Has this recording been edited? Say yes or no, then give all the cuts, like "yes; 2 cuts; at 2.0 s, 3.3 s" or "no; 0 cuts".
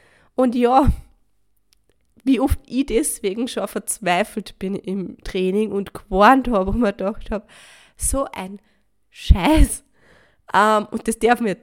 no; 0 cuts